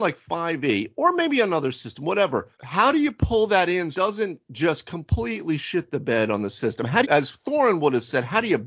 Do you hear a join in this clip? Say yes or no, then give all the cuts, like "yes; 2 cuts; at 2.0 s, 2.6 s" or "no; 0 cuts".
yes; 3 cuts; at 2.5 s, 3.9 s, 7.0 s